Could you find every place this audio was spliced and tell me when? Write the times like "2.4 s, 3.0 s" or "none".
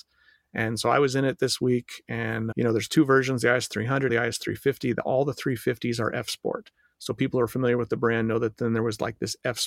2.5 s, 4.1 s